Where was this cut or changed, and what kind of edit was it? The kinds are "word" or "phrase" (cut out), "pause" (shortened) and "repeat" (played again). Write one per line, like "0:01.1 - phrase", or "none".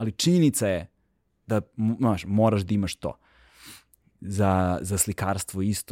none